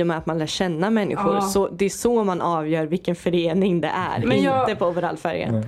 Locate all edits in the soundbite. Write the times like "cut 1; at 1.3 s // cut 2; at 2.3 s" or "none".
none